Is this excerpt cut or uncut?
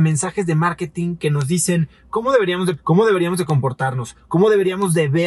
cut